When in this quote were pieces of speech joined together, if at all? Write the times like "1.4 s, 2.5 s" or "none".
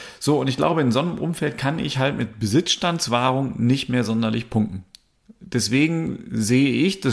none